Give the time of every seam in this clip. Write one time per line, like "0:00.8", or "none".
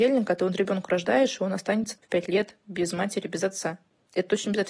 0:02.0